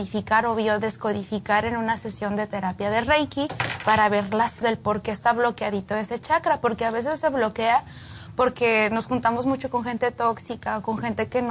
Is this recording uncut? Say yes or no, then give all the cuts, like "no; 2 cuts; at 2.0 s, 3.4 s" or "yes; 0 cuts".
no; 1 cut; at 4.6 s